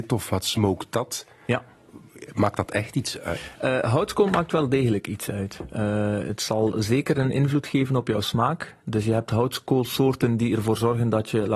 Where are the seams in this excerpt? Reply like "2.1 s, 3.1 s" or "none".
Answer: none